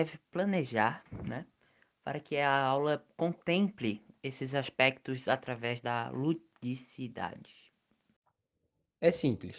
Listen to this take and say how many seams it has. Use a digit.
0